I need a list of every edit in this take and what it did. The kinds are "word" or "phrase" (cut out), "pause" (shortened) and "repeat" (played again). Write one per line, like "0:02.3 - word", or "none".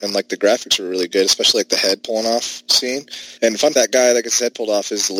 0:03.4 - pause
0:03.7 - word